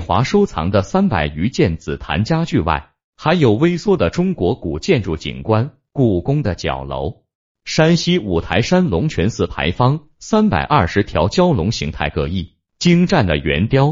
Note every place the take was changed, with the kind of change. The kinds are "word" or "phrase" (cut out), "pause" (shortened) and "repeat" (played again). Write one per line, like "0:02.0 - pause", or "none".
none